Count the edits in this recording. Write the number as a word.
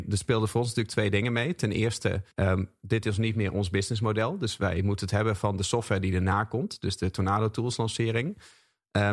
one